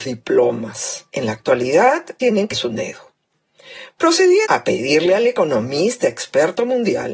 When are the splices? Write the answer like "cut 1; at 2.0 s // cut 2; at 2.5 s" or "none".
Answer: cut 1; at 1.1 s // cut 2; at 2.2 s // cut 3; at 2.5 s // cut 4; at 4.4 s